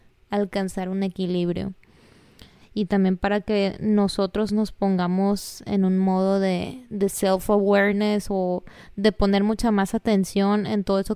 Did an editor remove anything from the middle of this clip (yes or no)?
no